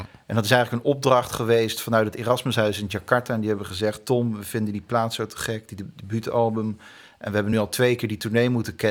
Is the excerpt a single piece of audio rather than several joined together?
yes; 0 cuts

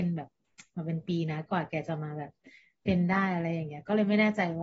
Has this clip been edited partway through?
no; 0 cuts

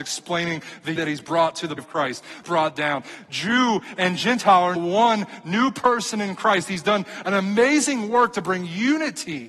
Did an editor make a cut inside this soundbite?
yes; 4 cuts; at 1.0 s, 1.8 s, 2.4 s, 4.8 s

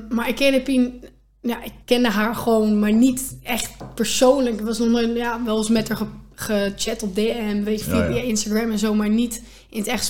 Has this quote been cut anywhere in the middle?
yes; 1 cut; at 1.8 s

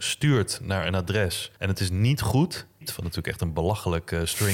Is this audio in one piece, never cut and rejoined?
no; 2 cuts; at 1.6 s, 2.8 s

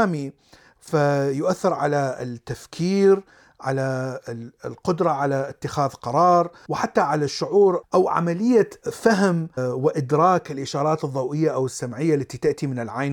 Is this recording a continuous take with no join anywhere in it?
yes; 0 cuts

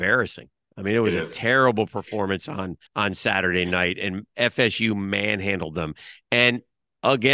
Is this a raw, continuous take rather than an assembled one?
no; 1 cut; at 2.9 s

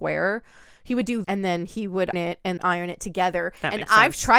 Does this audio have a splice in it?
yes; 3 cuts; at 1.2 s, 2.1 s, 2.6 s

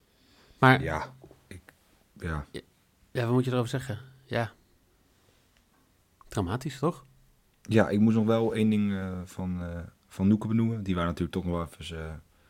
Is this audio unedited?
yes; 0 cuts

